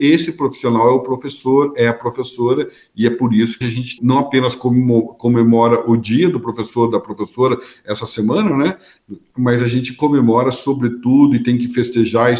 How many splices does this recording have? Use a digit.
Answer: 2